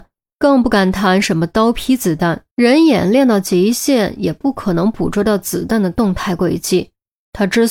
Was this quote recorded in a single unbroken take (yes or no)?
no